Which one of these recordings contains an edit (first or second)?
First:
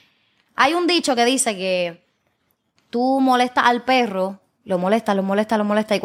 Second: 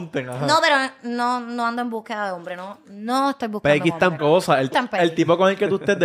second